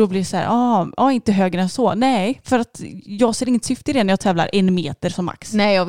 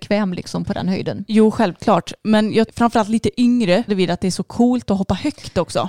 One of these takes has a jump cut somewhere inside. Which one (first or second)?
second